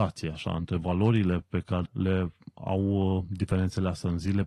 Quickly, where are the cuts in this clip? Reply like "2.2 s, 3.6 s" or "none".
1.9 s